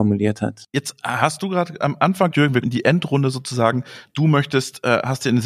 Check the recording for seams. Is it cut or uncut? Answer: cut